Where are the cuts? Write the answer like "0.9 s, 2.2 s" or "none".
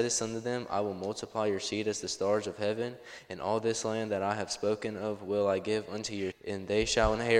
6.3 s